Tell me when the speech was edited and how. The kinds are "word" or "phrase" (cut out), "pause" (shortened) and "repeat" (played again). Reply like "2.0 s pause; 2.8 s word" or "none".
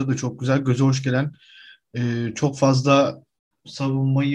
none